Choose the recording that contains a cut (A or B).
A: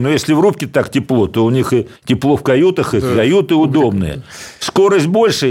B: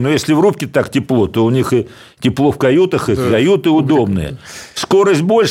A